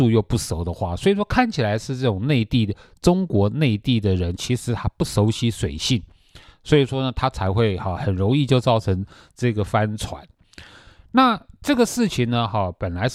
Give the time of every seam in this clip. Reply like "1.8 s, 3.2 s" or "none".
none